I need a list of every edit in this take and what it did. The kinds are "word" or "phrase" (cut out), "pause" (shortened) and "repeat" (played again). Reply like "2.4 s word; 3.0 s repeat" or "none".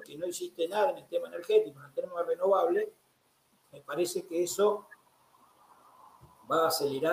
none